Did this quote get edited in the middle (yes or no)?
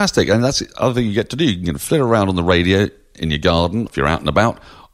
yes